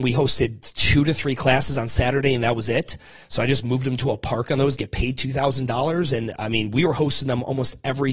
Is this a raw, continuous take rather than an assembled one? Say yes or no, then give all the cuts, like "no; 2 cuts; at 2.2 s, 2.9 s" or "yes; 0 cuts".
no; 1 cut; at 4.8 s